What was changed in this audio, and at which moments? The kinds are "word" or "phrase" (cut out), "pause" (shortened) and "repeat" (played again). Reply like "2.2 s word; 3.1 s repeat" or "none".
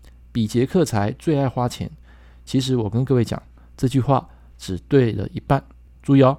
none